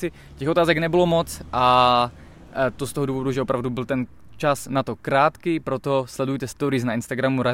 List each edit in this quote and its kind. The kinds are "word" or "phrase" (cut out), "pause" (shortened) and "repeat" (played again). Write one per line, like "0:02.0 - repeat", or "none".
none